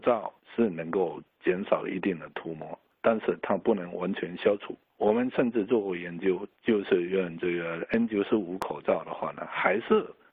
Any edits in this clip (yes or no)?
no